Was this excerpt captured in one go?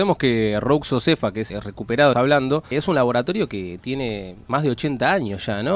no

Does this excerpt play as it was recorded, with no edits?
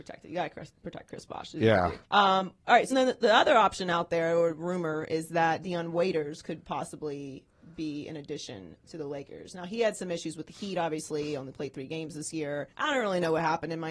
no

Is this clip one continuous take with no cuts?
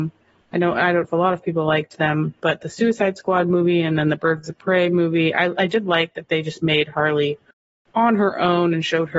no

